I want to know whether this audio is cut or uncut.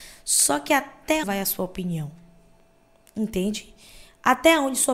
cut